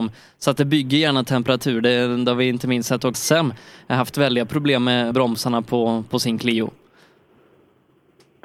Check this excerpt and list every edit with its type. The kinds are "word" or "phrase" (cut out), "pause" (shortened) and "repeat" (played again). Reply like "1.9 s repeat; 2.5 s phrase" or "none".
3.1 s phrase; 5.1 s word